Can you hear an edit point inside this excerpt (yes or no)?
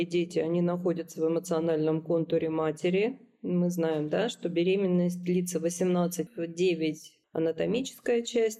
yes